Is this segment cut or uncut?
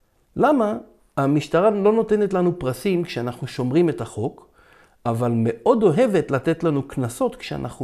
uncut